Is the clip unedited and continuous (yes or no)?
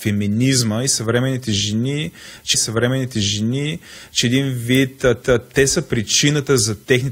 no